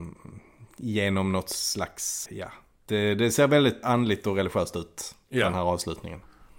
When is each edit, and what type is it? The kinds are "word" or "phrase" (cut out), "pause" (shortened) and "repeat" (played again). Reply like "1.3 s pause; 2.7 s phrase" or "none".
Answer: 2.3 s word; 3.8 s word